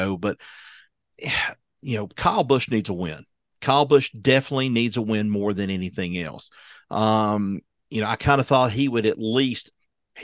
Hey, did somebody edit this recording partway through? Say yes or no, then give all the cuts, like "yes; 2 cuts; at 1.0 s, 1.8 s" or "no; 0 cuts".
no; 0 cuts